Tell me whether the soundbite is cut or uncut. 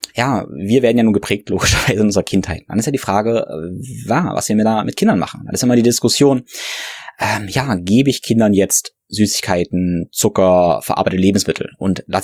uncut